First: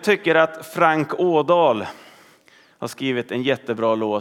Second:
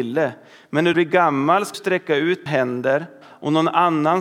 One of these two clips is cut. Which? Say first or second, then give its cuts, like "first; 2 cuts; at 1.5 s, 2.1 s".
second; 4 cuts; at 0.9 s, 1.7 s, 2.5 s, 3.2 s